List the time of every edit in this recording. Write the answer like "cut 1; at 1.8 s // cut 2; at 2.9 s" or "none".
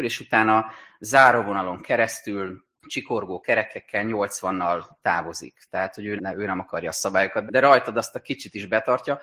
cut 1; at 2.7 s // cut 2; at 6.2 s // cut 3; at 7.5 s